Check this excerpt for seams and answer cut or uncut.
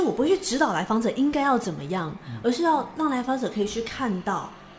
uncut